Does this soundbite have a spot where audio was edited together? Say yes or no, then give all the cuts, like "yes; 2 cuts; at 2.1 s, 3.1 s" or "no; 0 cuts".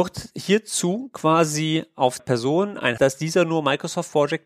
yes; 2 cuts; at 2.2 s, 3.0 s